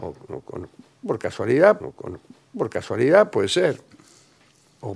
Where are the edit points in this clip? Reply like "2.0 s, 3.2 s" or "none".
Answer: 1.8 s